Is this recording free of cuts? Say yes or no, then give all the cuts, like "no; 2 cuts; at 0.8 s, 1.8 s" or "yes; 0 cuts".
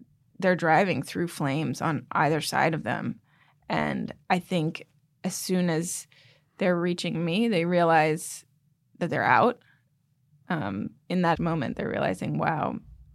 no; 2 cuts; at 4.2 s, 11.3 s